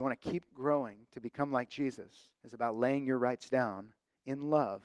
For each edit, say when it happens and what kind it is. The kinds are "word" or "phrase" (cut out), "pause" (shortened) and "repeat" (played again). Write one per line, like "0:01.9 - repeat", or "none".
0:02.4 - pause